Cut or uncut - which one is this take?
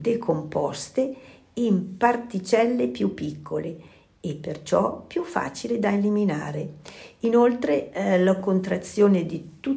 uncut